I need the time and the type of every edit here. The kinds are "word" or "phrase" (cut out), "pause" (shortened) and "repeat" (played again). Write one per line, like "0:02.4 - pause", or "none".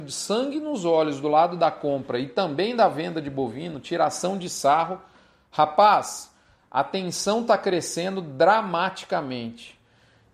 none